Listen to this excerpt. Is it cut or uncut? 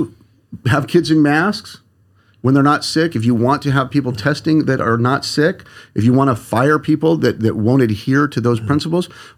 uncut